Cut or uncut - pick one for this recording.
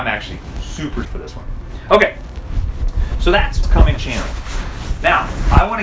cut